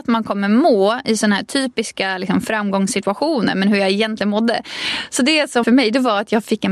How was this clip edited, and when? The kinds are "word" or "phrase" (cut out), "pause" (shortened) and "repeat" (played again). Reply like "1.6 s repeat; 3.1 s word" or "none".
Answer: 5.6 s word